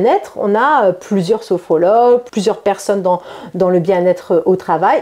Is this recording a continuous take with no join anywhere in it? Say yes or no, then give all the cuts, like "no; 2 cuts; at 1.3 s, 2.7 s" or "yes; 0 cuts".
yes; 0 cuts